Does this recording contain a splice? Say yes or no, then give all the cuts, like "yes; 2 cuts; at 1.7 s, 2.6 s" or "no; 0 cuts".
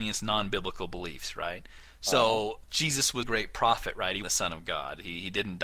yes; 3 cuts; at 2.6 s, 3.2 s, 4.2 s